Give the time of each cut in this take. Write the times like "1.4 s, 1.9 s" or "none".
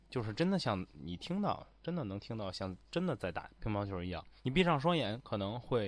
4.4 s